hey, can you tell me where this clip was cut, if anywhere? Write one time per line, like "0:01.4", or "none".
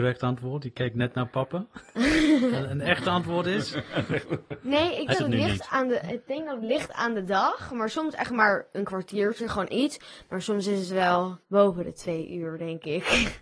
0:05.1
0:09.7
0:11.4